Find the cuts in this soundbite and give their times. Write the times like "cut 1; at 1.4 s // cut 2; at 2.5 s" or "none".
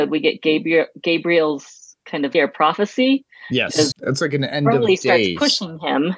cut 1; at 2.3 s // cut 2; at 3.9 s